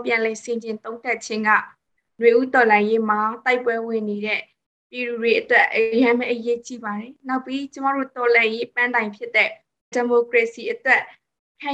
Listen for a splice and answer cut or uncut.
cut